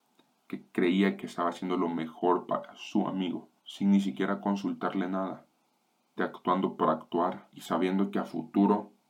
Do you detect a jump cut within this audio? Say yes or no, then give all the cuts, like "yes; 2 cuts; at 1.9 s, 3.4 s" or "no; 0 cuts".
yes; 2 cuts; at 3.6 s, 6.2 s